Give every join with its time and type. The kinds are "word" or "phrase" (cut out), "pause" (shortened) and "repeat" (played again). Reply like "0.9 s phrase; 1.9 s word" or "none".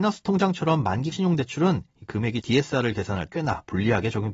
1.1 s word; 2.4 s word; 3.3 s word